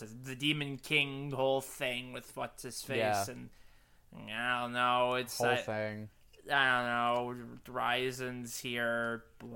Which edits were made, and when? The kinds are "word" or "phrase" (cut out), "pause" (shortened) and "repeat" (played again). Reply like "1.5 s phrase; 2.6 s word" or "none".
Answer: none

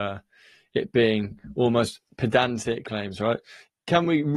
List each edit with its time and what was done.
2.8 s phrase

